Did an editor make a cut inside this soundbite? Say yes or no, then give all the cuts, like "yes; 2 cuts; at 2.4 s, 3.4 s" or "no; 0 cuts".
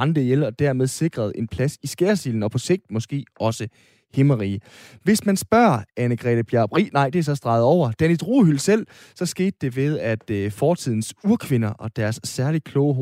no; 0 cuts